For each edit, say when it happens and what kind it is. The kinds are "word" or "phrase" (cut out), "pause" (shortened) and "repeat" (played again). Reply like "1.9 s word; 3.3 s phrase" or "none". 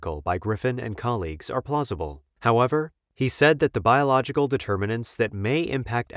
2.3 s pause